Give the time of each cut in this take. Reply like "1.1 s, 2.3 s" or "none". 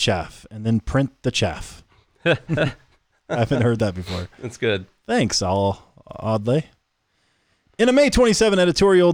none